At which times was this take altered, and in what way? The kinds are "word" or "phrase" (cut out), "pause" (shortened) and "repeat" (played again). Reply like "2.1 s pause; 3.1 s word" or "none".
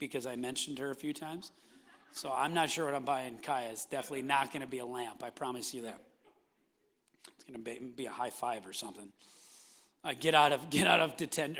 none